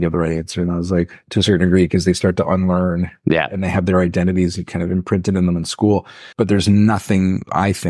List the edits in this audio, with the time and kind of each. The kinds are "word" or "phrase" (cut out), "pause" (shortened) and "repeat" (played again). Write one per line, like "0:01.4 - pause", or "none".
0:06.3 - pause